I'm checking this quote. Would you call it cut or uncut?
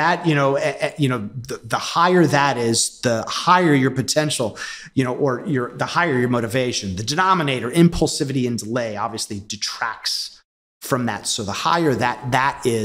uncut